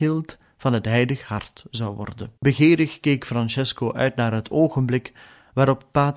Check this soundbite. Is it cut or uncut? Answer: cut